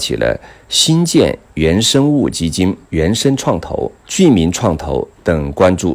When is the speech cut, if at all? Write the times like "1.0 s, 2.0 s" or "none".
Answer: 2.8 s, 4.0 s

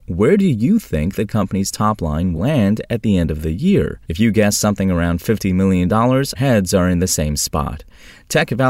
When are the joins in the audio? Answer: 2.3 s, 4.0 s, 6.3 s

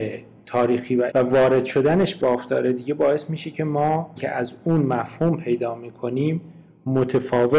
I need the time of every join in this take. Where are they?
1.1 s, 2.2 s, 4.2 s

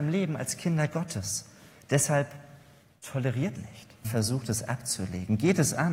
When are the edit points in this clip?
3.6 s, 4.0 s

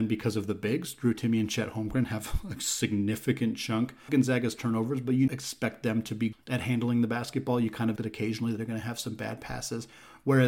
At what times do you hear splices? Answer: 4.1 s, 5.3 s, 6.3 s, 8.0 s

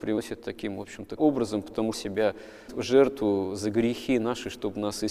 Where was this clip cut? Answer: 1.2 s, 1.9 s, 2.7 s

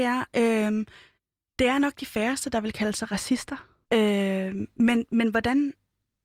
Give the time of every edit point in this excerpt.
1.1 s, 3.8 s

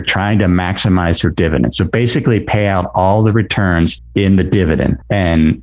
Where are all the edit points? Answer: none

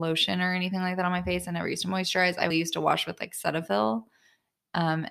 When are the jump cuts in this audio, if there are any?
2.5 s

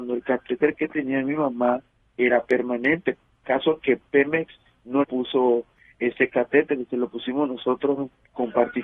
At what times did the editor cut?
5.0 s

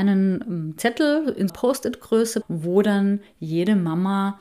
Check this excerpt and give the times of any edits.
1.5 s, 2.4 s

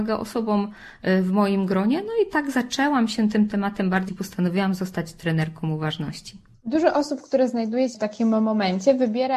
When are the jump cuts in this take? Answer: 4.1 s, 7.9 s

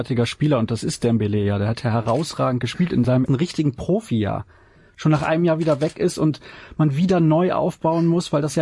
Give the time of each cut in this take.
3.3 s

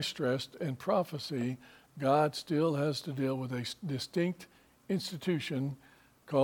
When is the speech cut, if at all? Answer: none

